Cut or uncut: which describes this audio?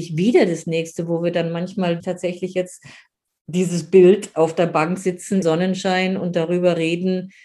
cut